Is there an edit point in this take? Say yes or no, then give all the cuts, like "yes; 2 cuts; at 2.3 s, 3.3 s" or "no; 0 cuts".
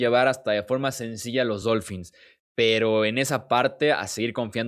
no; 0 cuts